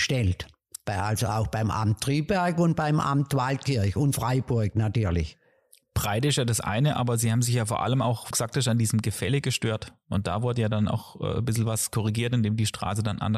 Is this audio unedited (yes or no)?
no